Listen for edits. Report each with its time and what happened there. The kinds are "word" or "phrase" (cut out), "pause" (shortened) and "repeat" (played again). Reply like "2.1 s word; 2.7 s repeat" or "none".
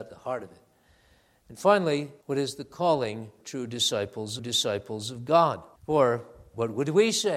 2.2 s pause; 3.4 s word; 4.4 s repeat; 5.8 s pause